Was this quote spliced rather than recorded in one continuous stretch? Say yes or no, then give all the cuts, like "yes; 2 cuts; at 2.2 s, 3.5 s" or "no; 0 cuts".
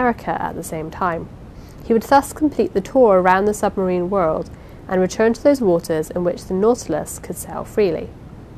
no; 0 cuts